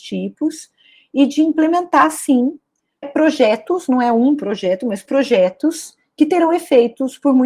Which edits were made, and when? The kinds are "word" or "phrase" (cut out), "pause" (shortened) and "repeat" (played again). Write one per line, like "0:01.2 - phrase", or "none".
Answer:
0:03.0 - word